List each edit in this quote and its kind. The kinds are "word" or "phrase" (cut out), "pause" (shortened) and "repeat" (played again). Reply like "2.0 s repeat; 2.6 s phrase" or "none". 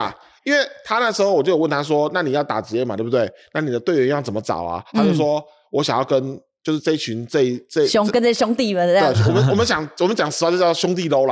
9.1 s word